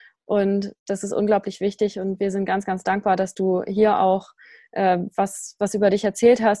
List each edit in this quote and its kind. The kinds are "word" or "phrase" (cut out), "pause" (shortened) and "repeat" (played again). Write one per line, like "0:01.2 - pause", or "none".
none